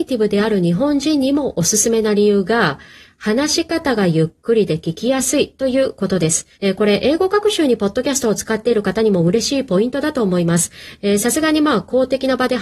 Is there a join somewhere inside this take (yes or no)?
yes